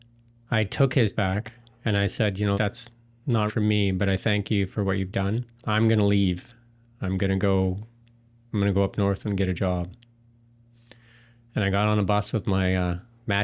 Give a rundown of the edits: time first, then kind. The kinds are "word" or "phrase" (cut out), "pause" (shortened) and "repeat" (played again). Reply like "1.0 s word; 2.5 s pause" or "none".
1.1 s word; 2.5 s word; 3.5 s word; 5.6 s word